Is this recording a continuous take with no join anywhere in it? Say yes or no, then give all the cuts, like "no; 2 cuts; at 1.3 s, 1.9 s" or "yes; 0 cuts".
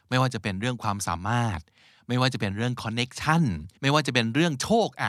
no; 1 cut; at 3.8 s